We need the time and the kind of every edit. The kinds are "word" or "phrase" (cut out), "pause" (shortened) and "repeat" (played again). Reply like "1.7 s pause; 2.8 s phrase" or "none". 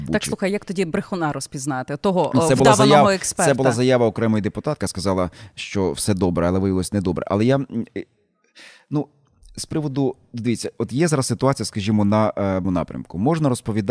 4.8 s word; 12.6 s word